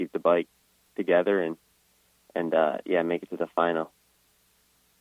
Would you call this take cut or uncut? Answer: uncut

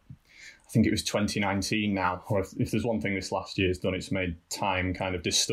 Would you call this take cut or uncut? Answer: uncut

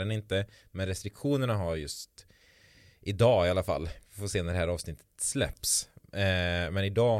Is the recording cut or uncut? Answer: uncut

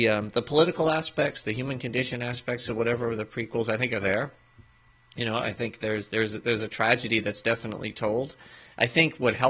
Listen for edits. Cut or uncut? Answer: uncut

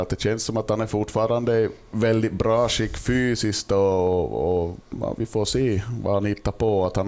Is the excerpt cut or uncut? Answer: uncut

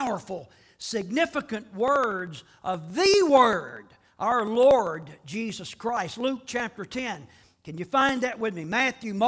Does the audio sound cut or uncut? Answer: uncut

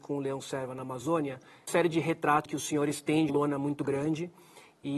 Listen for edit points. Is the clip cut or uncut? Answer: cut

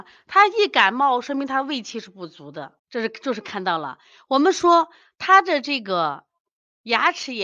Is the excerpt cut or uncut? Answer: cut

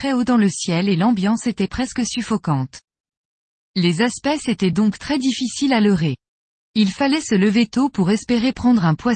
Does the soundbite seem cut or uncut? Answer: uncut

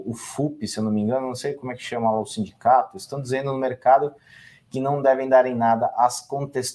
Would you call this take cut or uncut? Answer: uncut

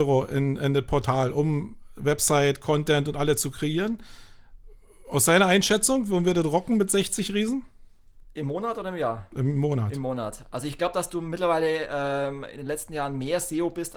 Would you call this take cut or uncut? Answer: uncut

